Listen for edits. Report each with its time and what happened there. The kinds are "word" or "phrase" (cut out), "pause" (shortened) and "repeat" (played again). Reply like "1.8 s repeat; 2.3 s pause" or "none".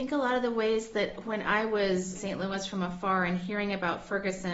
2.2 s word

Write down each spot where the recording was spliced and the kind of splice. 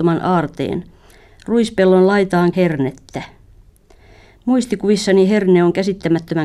2.5 s phrase

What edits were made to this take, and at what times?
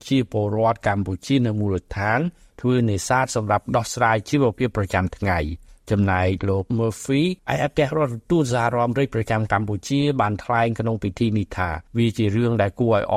5.7 s pause; 6.7 s word; 7.4 s pause; 11.9 s pause

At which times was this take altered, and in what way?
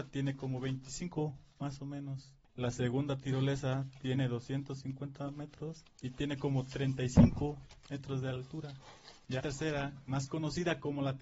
9.4 s word

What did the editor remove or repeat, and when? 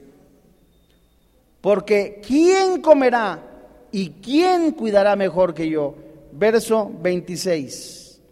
none

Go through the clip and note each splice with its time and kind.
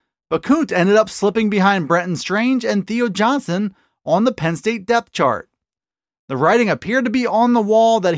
none

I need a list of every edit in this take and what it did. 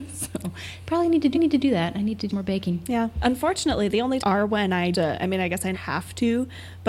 1.3 s repeat; 2.3 s word; 4.2 s phrase; 4.9 s phrase; 5.7 s word

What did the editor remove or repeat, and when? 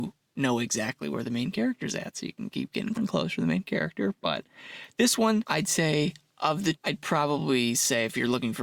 2.9 s word; 6.7 s word

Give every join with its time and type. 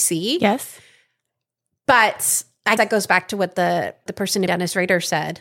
2.8 s word; 4.1 s word; 4.5 s word

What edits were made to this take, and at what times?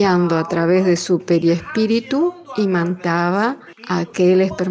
3.7 s pause

